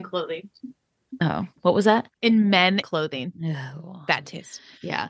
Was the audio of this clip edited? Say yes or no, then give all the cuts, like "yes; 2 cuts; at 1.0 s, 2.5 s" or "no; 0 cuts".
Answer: yes; 3 cuts; at 1.6 s, 2.1 s, 2.8 s